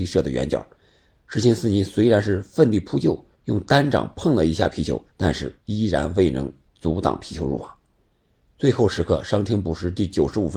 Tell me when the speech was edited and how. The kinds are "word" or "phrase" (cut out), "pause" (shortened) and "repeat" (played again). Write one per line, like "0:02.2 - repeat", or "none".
0:03.3 - pause
0:05.1 - pause
0:05.6 - pause